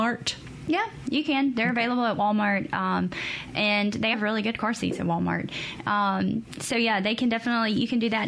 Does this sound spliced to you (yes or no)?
yes